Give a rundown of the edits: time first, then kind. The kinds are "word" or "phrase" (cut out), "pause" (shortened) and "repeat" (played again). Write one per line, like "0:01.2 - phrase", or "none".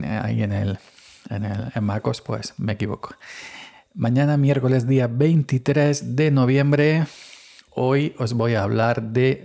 none